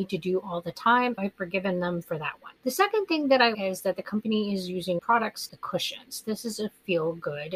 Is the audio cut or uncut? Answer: cut